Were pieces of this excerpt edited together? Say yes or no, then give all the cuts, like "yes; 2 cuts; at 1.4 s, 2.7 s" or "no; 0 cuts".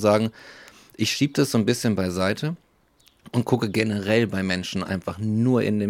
no; 0 cuts